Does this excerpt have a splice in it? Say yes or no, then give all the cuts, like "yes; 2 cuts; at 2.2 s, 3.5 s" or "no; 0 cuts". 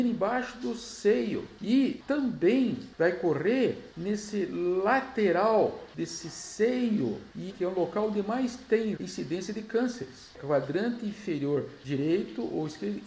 yes; 2 cuts; at 7.5 s, 9.0 s